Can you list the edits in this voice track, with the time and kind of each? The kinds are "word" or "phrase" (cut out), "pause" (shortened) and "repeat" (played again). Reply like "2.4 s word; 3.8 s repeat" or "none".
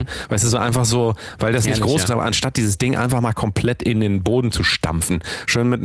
2.0 s word